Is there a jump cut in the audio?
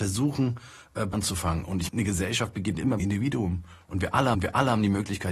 yes; 4 cuts; at 1.1 s, 1.9 s, 3.0 s, 4.3 s

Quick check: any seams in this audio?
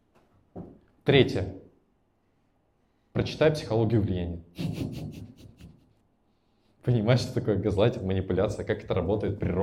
no; 0 cuts

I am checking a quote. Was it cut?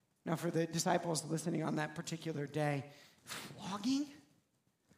no; 0 cuts

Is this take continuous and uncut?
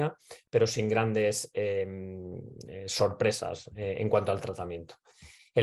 yes; 0 cuts

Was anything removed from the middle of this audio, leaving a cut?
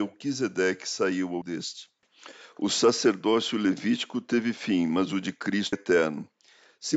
yes; 2 cuts; at 1.4 s, 5.7 s

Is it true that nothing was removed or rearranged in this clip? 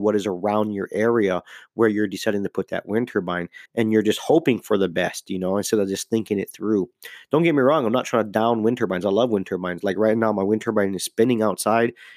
no; 1 cut; at 3.7 s

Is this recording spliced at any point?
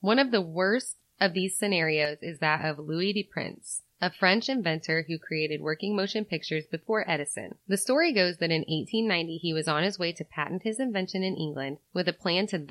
yes; 2 cuts; at 3.9 s, 7.6 s

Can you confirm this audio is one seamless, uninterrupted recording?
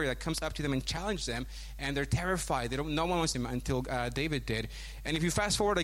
no; 1 cut; at 3.3 s

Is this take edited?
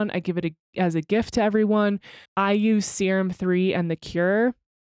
yes; 1 cut; at 2.2 s

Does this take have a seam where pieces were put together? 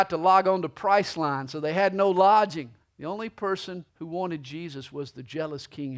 yes; 2 cuts; at 2.8 s, 3.9 s

